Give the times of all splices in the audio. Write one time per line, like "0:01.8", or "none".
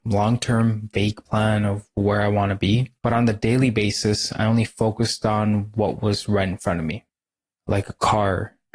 0:03.0